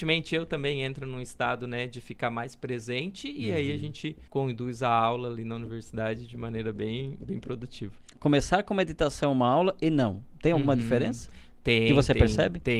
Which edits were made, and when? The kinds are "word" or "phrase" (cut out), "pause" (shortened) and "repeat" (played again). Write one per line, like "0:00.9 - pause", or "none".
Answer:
0:04.3 - pause